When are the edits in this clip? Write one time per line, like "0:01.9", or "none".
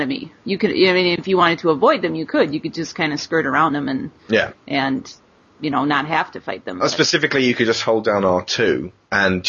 none